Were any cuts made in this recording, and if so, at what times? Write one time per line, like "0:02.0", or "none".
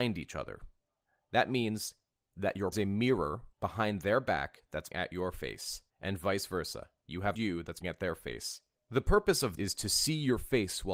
0:02.7
0:03.5
0:04.9
0:05.9
0:07.3
0:07.8
0:08.8
0:09.6